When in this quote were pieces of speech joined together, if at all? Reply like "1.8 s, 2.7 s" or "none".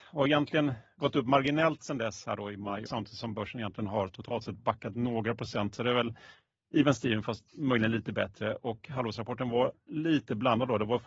2.9 s